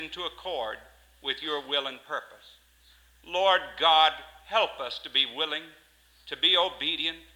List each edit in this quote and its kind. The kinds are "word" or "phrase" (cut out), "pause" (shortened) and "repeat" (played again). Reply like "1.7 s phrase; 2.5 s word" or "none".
none